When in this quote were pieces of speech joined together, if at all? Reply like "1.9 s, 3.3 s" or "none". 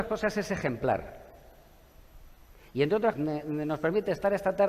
3.1 s